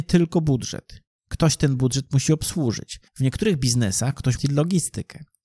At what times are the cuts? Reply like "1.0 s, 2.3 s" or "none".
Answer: 3.1 s, 4.4 s

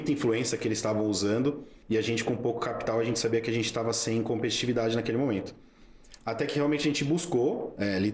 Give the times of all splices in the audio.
1.8 s

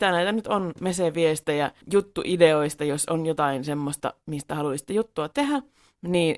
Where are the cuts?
1.8 s

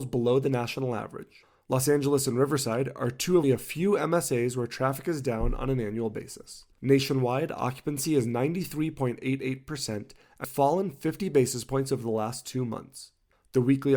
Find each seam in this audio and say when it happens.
3.4 s, 6.7 s, 10.4 s

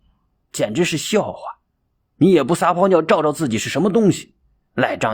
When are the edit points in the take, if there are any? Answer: none

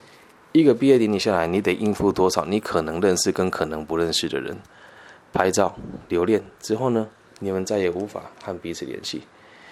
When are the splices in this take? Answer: none

